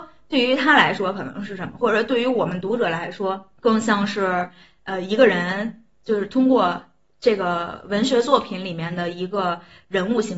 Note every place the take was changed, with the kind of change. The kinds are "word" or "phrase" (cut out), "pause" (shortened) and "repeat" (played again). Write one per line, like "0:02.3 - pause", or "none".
0:03.6 - pause